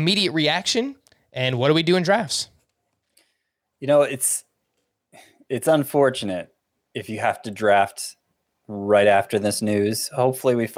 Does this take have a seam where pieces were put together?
no; 0 cuts

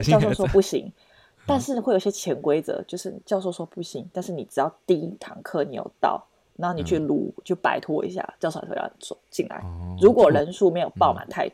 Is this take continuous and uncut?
yes; 0 cuts

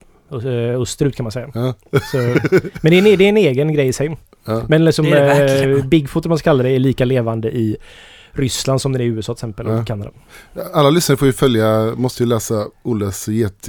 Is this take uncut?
yes; 0 cuts

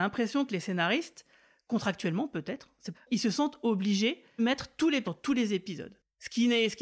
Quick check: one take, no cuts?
no; 3 cuts; at 2.9 s, 4.4 s, 5.0 s

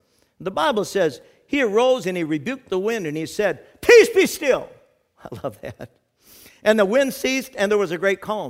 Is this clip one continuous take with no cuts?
yes; 0 cuts

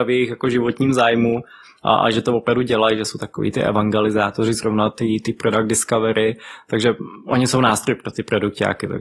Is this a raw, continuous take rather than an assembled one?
yes; 0 cuts

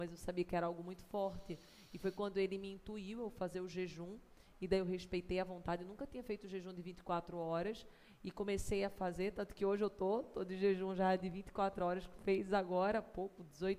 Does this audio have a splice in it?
no; 0 cuts

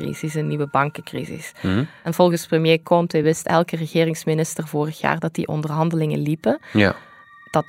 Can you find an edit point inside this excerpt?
no; 0 cuts

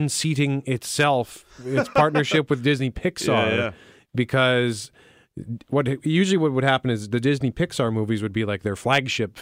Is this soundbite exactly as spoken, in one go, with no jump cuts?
yes; 0 cuts

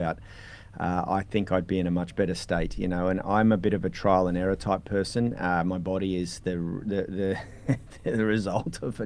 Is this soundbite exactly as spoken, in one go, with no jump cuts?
yes; 0 cuts

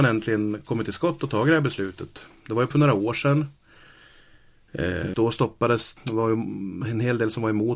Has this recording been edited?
yes; 3 cuts; at 2.7 s, 5.1 s, 6.0 s

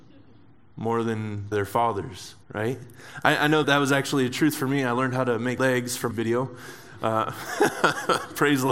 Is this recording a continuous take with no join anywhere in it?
no; 5 cuts; at 1.5 s, 2.4 s, 3.6 s, 5.6 s, 6.1 s

